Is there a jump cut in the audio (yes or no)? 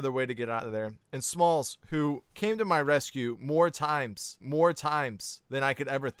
yes